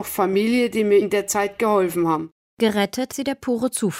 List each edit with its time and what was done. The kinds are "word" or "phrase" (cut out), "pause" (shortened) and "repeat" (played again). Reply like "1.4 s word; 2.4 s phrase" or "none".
1.0 s word; 3.1 s word